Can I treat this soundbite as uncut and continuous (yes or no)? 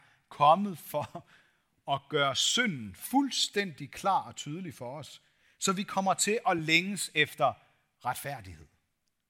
yes